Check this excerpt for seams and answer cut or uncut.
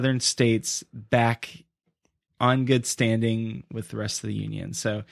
uncut